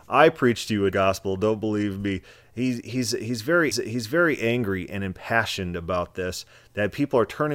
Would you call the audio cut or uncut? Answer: cut